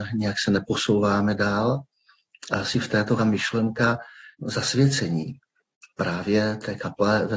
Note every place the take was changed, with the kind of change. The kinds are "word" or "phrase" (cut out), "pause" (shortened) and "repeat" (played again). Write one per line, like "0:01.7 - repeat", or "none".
0:03.2 - phrase